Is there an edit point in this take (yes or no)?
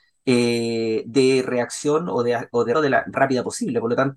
yes